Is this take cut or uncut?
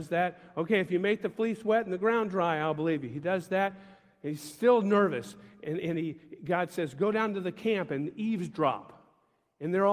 uncut